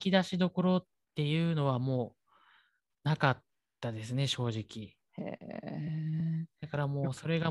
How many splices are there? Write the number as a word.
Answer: zero